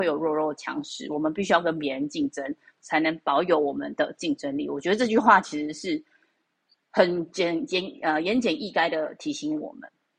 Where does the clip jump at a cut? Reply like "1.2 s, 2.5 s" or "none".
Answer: none